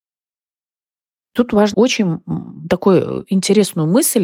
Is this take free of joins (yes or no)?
no